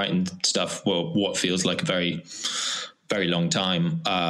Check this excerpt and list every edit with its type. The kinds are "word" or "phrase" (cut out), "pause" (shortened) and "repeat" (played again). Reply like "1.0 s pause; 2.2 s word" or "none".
none